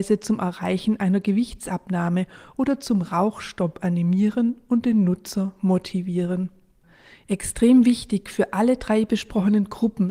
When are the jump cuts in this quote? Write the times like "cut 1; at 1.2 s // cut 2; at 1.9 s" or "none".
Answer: none